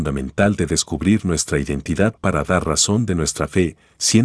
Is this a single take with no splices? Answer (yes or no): yes